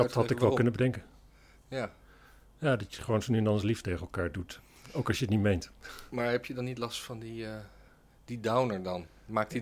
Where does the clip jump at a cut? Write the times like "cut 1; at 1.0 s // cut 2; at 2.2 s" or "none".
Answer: none